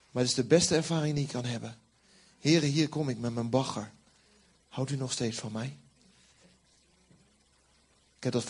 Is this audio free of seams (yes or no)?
yes